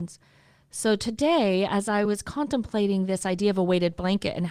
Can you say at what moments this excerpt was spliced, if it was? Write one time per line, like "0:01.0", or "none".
none